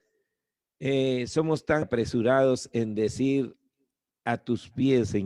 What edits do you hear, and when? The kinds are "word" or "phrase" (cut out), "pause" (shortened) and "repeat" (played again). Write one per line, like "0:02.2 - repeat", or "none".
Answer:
0:01.8 - word

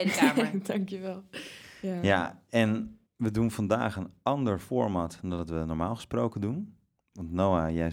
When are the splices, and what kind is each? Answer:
0:03.1 - pause

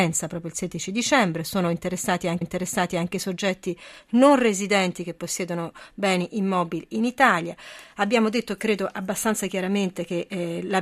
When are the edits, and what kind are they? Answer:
0:02.4 - repeat

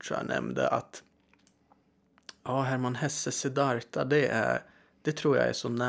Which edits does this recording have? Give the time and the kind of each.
none

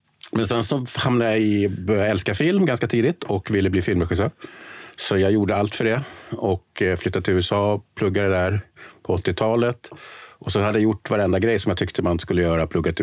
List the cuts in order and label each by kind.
none

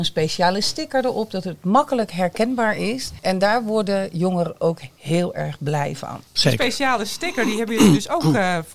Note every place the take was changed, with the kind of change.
none

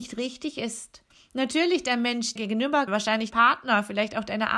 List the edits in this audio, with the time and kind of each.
0:01.1 - pause
0:02.4 - word
0:02.9 - word
0:03.3 - word

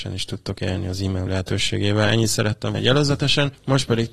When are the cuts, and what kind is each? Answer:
0:01.3 - word
0:02.7 - word

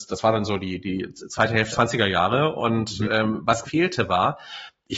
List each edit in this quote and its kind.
0:01.7 - word
0:03.6 - word

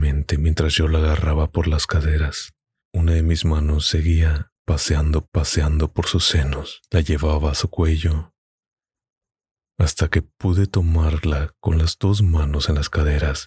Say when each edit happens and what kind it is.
0:02.8 - pause
0:05.2 - repeat
0:06.9 - pause
0:09.0 - pause

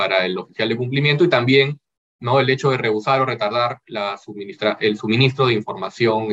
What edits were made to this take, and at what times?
none

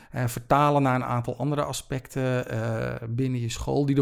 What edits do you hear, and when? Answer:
none

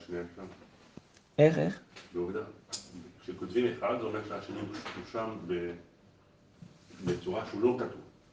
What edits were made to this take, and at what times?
none

